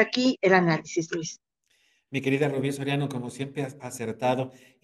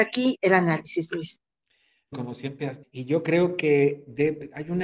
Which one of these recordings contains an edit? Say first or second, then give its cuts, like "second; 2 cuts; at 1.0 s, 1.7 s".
second; 2 cuts; at 2.1 s, 2.8 s